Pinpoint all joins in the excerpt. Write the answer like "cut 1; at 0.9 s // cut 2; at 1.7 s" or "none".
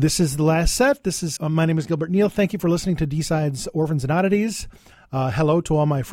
cut 1; at 1.4 s